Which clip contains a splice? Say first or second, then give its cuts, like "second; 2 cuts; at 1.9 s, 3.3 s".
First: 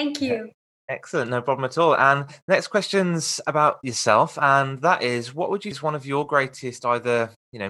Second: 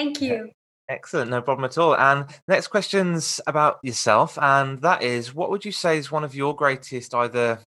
first; 1 cut; at 5.7 s